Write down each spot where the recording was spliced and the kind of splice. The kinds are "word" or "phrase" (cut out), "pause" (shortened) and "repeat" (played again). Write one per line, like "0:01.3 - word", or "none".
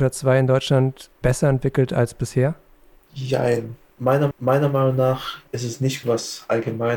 0:01.2 - pause
0:04.3 - repeat
0:05.5 - pause
0:06.0 - word